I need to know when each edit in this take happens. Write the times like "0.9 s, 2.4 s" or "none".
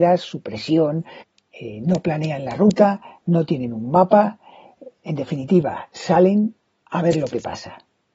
none